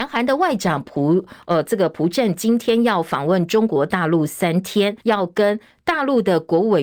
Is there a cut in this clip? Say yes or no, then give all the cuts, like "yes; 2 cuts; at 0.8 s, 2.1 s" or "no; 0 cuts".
yes; 1 cut; at 5.0 s